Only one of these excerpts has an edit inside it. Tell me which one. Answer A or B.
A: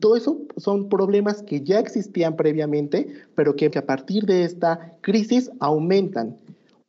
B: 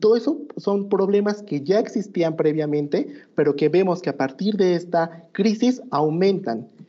A